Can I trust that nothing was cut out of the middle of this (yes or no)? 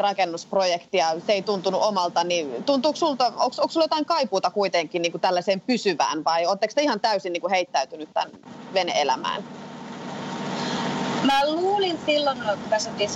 yes